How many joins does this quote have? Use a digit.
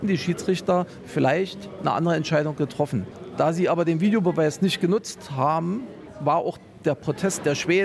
0